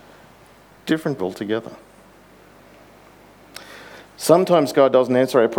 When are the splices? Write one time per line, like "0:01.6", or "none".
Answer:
0:01.2

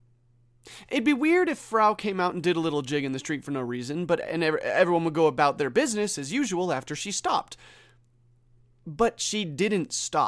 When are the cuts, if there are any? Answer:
none

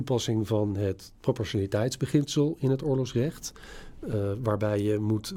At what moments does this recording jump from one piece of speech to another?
none

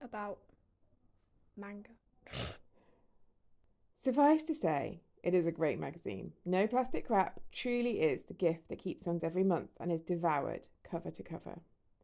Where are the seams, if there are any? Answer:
0:02.6
0:07.5
0:09.2

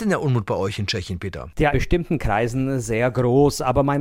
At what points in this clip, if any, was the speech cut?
0:01.7

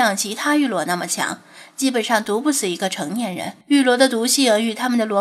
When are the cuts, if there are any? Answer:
0:03.6

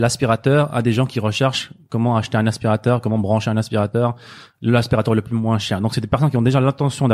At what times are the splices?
none

